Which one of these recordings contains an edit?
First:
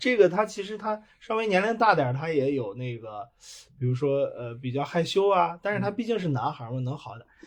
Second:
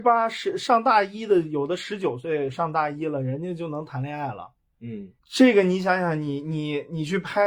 second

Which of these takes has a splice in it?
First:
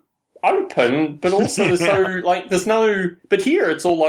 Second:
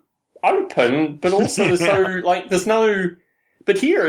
first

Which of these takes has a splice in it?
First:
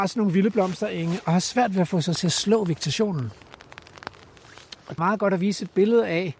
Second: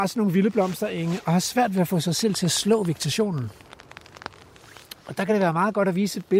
first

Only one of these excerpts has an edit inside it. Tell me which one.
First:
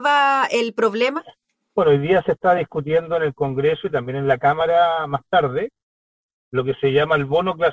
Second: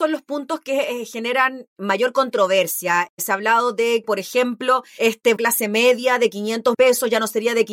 second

